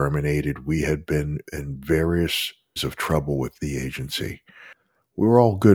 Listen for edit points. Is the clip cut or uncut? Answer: cut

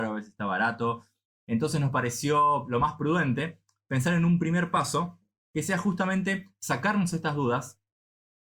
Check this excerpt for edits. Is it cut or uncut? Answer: uncut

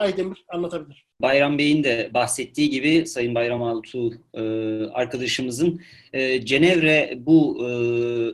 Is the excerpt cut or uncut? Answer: uncut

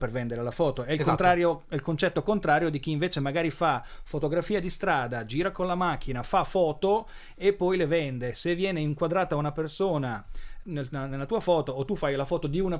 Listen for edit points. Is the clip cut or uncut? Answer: cut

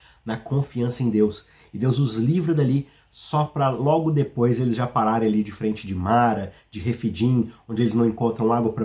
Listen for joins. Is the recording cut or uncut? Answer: uncut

